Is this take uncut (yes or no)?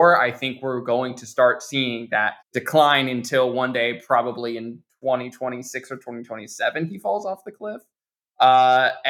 no